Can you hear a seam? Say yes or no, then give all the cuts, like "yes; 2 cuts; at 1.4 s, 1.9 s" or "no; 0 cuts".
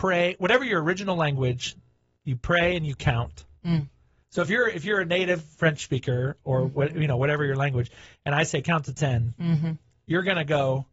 no; 0 cuts